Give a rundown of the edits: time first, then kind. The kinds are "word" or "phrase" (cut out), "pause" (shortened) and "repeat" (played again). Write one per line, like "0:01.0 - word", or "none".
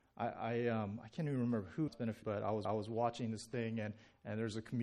0:01.9 - word
0:02.2 - word
0:02.6 - repeat

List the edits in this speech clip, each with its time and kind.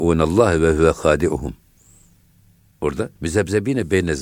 0:03.2 - pause

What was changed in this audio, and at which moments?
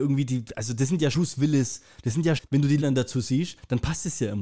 0:01.1 - word
0:02.4 - word
0:02.8 - word

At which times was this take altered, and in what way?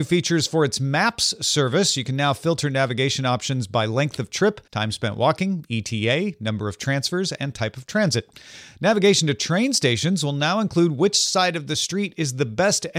0:04.7 - pause

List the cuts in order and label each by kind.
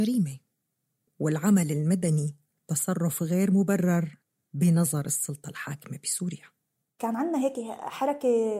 none

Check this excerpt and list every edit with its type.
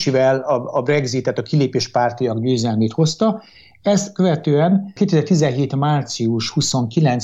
none

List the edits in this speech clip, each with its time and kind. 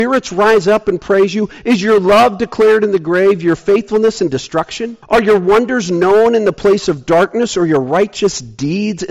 0:05.0 - pause

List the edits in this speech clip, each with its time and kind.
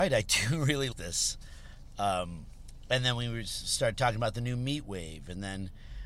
0:00.9 - word

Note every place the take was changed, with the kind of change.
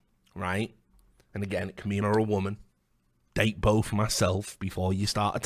0:02.0 - word

